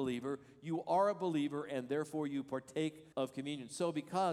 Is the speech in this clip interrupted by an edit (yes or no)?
yes